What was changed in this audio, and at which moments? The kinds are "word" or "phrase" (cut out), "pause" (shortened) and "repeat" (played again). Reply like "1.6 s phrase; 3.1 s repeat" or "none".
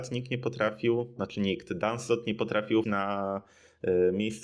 2.8 s word